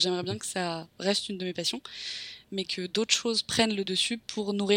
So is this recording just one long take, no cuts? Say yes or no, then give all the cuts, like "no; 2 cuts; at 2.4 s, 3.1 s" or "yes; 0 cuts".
yes; 0 cuts